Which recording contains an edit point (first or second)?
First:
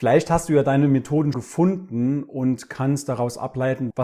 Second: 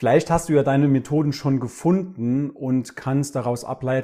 first